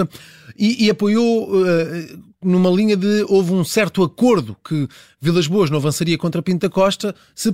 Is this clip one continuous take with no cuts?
yes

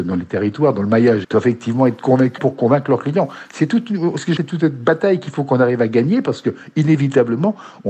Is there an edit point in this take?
yes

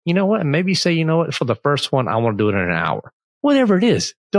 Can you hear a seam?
no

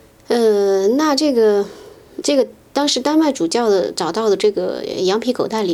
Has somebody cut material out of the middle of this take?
yes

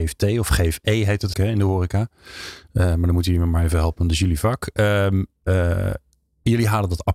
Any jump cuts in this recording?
yes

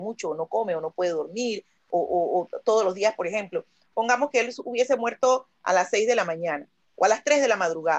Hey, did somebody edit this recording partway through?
no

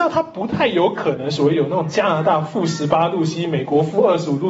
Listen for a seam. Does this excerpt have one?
no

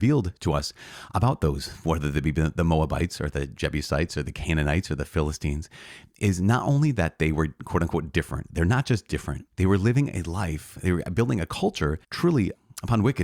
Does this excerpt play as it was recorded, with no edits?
no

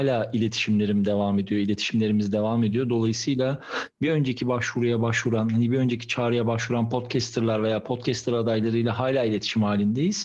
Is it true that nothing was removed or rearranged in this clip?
yes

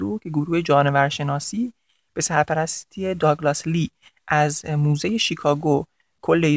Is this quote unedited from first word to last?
yes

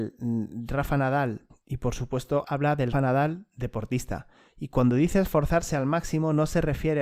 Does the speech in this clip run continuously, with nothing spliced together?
no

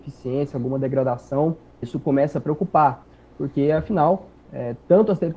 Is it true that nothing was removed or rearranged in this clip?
no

